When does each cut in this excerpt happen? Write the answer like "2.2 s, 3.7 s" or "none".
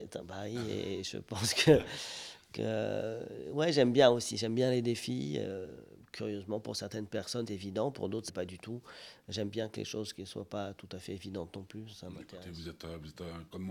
7.5 s, 8.3 s